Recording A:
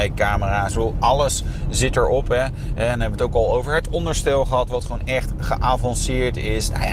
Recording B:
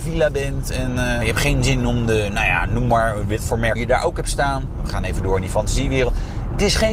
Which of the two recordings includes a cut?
B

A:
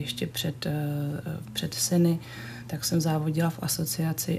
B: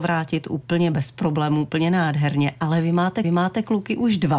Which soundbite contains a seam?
B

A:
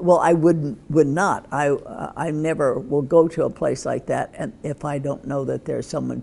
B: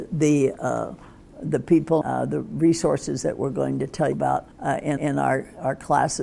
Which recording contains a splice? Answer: B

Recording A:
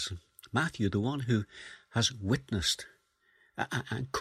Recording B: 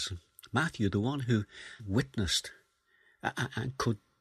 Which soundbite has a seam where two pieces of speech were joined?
B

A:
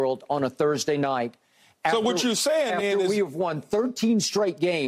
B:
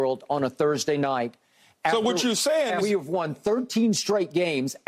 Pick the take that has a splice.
B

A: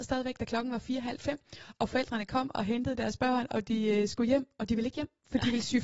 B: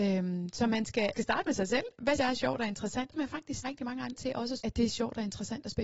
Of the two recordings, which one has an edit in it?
B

